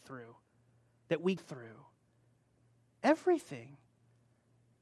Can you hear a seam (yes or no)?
yes